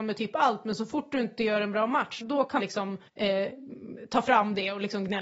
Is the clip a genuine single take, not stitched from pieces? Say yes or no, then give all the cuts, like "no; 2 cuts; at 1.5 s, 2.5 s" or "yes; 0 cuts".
no; 3 cuts; at 2.2 s, 2.6 s, 3.1 s